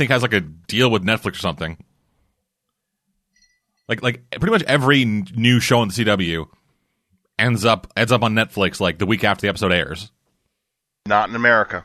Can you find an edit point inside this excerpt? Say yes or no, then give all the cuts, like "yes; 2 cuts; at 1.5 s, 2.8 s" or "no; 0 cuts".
no; 0 cuts